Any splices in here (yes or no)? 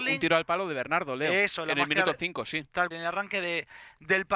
yes